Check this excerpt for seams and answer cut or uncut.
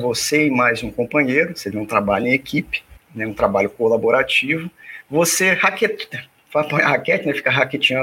uncut